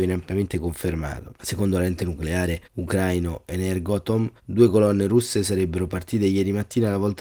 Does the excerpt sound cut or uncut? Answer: cut